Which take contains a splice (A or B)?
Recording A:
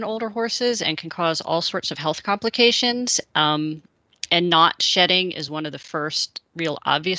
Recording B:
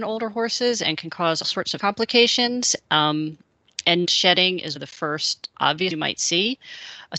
B